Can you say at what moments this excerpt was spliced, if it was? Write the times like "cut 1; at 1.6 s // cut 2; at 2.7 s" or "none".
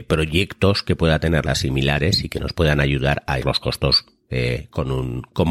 cut 1; at 1.5 s // cut 2; at 3.4 s